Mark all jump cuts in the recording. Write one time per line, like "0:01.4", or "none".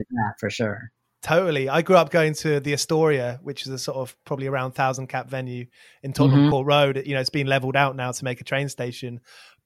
none

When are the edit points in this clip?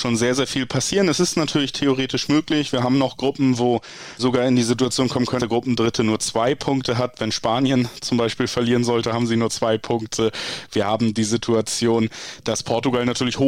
0:04.2
0:05.4

